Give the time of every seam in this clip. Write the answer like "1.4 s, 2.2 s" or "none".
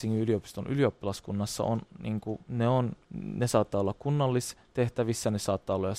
3.0 s